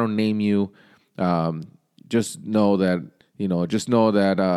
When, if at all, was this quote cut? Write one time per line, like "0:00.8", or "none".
0:03.2